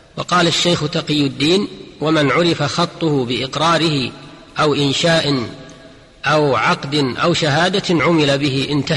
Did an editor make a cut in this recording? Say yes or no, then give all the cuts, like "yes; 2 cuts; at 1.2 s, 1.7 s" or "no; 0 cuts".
no; 0 cuts